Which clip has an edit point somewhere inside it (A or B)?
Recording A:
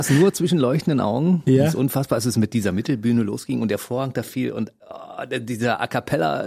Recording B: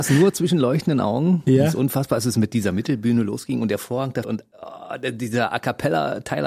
B